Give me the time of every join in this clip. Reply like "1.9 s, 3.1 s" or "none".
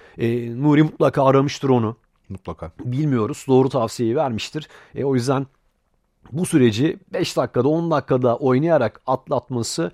none